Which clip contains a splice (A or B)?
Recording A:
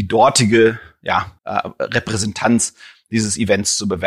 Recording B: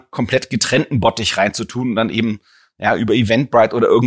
A